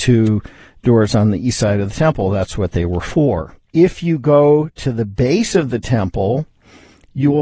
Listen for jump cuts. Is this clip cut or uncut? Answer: uncut